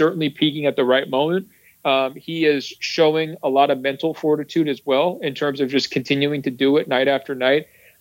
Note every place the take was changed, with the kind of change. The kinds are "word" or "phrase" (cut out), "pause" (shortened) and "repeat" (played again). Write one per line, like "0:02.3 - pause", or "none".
none